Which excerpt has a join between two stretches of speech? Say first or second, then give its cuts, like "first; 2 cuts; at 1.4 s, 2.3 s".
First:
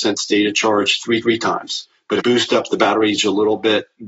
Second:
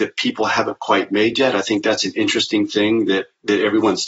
first; 3 cuts; at 1.2 s, 2.2 s, 3.2 s